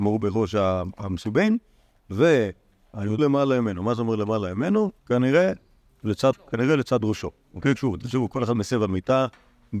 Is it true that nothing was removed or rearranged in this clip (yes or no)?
no